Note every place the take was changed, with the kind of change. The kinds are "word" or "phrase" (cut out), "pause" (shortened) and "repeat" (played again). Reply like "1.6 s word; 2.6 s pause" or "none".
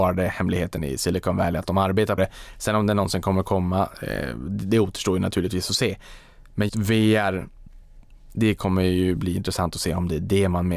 2.2 s word; 6.7 s word